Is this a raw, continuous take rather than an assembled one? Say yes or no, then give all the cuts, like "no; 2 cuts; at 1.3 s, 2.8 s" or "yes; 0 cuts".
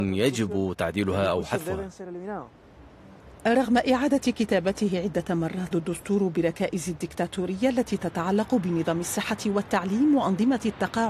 no; 1 cut; at 5.7 s